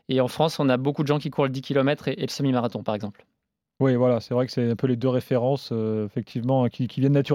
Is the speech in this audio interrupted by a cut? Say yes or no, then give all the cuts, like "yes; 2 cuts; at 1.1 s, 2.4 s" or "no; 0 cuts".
no; 0 cuts